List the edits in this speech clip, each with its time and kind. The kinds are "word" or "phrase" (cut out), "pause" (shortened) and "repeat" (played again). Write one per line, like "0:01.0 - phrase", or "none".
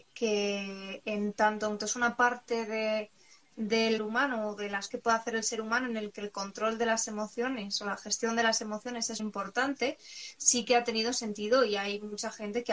0:01.8 - word
0:04.0 - word
0:04.9 - word
0:09.2 - word